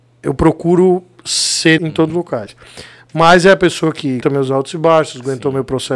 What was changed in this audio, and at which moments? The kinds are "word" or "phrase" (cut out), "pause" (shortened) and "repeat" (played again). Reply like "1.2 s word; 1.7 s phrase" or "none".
1.8 s word; 2.1 s word; 4.2 s word